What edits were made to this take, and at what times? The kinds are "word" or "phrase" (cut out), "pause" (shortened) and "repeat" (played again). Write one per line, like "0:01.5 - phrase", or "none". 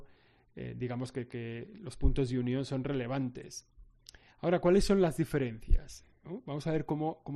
none